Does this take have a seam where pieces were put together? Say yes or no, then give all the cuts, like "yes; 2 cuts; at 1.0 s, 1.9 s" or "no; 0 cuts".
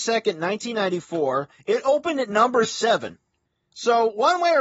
no; 0 cuts